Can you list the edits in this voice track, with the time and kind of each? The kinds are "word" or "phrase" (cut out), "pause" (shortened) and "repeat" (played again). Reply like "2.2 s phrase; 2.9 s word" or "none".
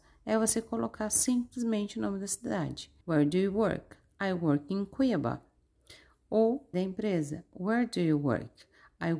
3.0 s pause; 6.7 s phrase